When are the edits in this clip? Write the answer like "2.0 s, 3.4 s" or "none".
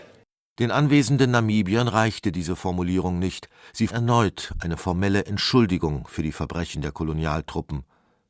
3.9 s

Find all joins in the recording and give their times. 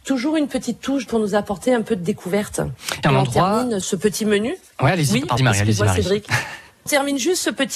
1.1 s, 3.0 s, 3.8 s, 5.4 s, 6.9 s

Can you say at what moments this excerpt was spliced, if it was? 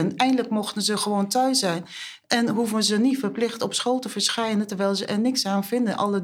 none

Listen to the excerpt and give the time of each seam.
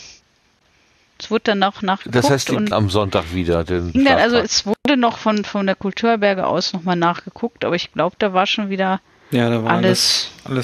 2.7 s, 3.9 s

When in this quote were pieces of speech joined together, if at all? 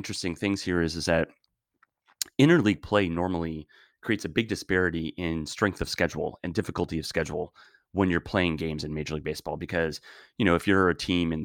none

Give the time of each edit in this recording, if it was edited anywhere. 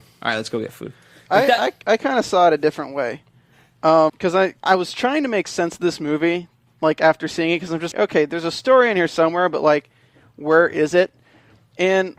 4.1 s, 4.6 s, 7.9 s

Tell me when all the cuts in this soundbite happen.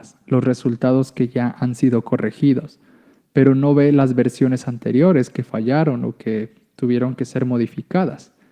none

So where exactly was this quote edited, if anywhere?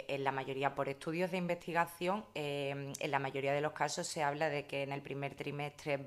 none

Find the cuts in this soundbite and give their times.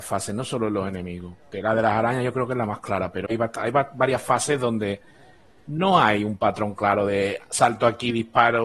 3.3 s

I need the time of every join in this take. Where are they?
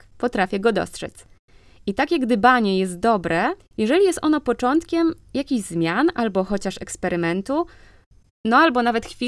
3.6 s

